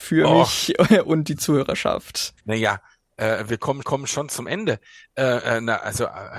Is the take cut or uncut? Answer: cut